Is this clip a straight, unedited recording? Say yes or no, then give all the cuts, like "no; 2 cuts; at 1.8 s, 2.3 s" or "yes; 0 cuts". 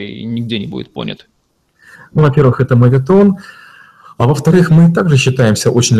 yes; 0 cuts